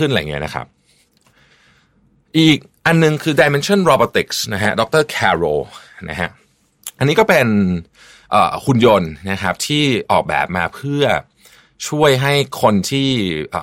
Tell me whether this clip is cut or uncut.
uncut